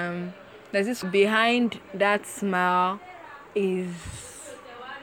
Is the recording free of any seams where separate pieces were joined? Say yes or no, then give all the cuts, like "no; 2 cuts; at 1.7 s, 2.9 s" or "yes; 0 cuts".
no; 2 cuts; at 1.0 s, 3.5 s